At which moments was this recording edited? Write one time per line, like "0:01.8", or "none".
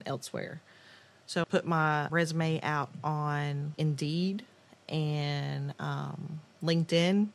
0:01.4
0:02.1
0:03.7